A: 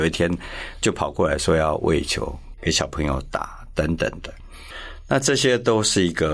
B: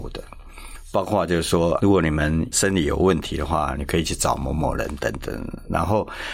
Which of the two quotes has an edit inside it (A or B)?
B